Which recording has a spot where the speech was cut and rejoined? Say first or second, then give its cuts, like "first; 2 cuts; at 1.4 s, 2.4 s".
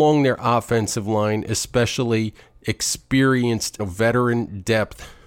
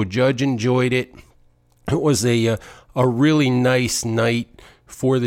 first; 1 cut; at 3.8 s